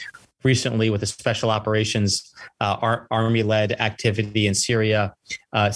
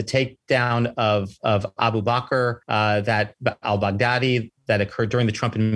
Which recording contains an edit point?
second; 1 cut; at 2.6 s

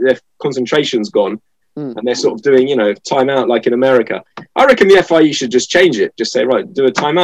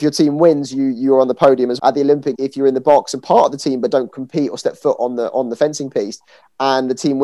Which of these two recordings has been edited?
second; 2 cuts; at 1.8 s, 2.4 s

